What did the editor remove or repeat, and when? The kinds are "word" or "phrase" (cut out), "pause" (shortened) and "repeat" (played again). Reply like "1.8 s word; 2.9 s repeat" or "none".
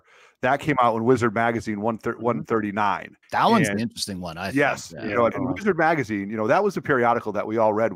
3.2 s pause; 5.3 s word